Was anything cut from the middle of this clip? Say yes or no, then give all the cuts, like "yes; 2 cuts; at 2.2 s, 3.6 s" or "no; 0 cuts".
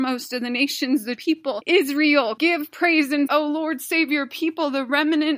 yes; 3 cuts; at 1.2 s, 2.4 s, 3.3 s